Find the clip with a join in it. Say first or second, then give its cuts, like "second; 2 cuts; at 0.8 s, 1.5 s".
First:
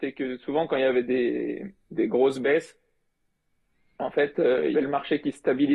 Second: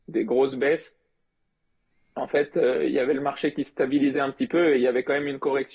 first; 1 cut; at 4.7 s